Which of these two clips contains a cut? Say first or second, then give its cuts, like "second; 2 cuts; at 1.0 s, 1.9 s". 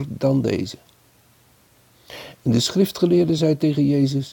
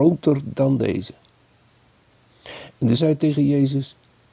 second; 1 cut; at 3.0 s